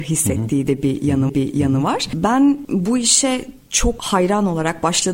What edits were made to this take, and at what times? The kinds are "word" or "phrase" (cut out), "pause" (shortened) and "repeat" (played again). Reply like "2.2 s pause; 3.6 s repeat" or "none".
1.3 s repeat